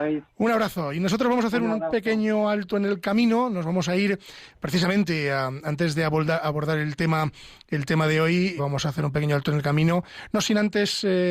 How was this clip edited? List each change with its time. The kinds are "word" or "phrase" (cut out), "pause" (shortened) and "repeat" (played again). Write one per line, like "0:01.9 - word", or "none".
0:08.6 - word